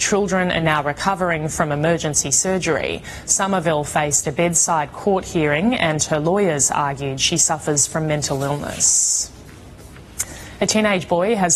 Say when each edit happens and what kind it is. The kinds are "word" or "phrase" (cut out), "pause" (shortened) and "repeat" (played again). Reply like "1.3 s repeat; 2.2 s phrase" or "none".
none